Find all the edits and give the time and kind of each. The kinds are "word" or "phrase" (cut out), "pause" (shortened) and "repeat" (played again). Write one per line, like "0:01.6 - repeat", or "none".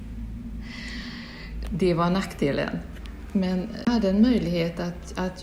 0:03.8 - word